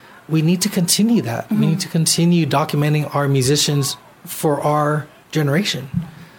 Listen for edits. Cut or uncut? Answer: uncut